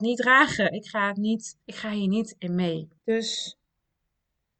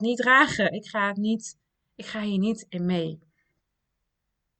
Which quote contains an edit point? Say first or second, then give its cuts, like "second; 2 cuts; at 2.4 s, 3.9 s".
first; 2 cuts; at 1.6 s, 3.0 s